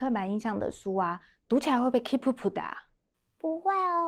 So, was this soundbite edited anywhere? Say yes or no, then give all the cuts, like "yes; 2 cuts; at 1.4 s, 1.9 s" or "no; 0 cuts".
no; 0 cuts